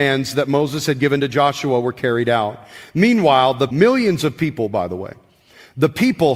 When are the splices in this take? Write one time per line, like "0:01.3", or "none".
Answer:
0:03.7